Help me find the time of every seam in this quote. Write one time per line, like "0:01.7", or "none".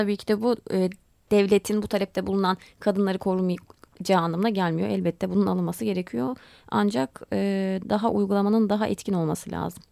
none